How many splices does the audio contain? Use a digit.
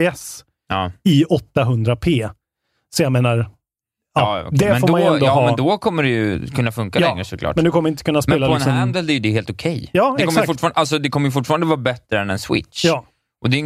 0